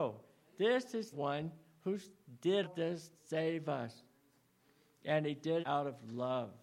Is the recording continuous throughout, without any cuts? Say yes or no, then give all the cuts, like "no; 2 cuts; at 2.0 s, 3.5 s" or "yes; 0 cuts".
no; 4 cuts; at 1.1 s, 2.6 s, 3.1 s, 5.6 s